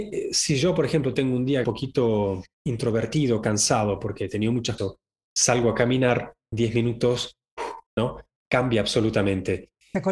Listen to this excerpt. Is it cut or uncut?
cut